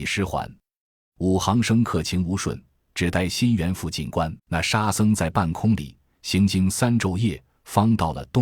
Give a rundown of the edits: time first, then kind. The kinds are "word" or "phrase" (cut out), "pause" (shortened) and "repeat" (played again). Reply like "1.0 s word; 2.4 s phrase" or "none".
4.4 s pause